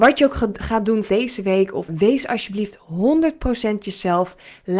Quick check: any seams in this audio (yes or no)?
yes